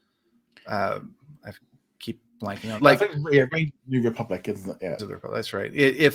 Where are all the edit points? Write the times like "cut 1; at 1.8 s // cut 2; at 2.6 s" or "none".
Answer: cut 1; at 2.8 s // cut 2; at 5.0 s